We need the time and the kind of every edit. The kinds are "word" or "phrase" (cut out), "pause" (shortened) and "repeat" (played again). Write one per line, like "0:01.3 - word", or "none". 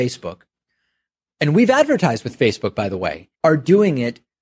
0:03.3 - pause